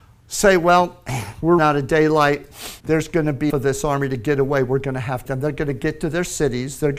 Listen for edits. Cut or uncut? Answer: cut